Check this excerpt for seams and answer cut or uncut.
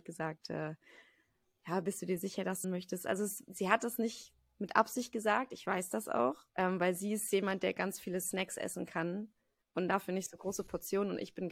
cut